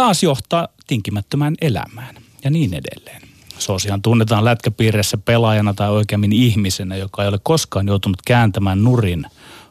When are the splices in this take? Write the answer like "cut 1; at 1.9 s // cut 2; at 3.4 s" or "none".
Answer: none